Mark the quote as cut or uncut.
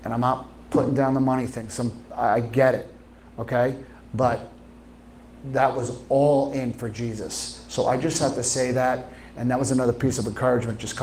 uncut